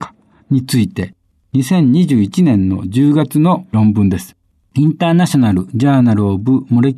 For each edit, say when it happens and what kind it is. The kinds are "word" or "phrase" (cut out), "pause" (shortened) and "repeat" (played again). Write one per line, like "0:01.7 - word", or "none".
none